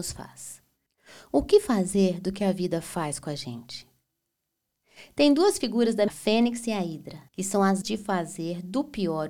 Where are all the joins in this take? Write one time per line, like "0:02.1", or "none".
0:06.1
0:07.3
0:07.8